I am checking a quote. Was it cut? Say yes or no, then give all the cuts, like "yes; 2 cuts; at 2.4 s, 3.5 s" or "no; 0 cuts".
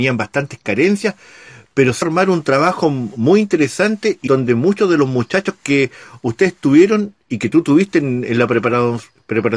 yes; 2 cuts; at 2.0 s, 4.3 s